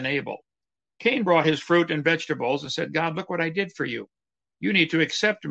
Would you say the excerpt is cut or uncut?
uncut